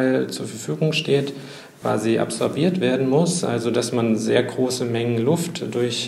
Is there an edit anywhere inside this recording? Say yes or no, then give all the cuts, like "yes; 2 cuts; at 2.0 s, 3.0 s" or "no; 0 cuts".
no; 0 cuts